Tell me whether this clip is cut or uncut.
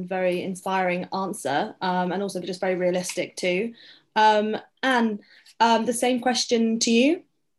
uncut